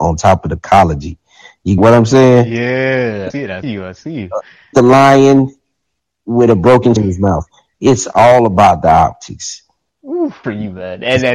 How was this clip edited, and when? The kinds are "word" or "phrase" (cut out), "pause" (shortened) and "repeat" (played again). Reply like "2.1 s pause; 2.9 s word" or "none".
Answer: 1.8 s word; 3.3 s word; 3.6 s word; 4.7 s word; 7.0 s word; 10.4 s word